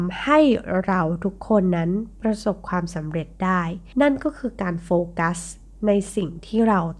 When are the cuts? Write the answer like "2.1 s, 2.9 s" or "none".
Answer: none